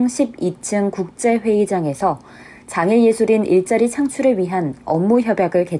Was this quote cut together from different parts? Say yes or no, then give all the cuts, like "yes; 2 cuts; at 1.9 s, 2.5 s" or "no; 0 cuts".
no; 0 cuts